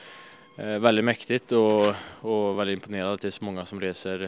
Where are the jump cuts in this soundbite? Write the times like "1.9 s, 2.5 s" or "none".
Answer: none